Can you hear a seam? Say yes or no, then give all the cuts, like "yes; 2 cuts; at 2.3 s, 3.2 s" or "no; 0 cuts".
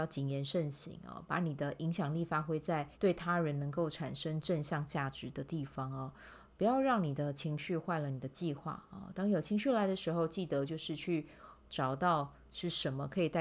yes; 1 cut; at 2.9 s